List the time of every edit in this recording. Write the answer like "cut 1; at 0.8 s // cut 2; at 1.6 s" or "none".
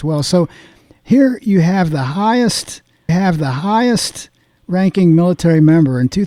cut 1; at 3.1 s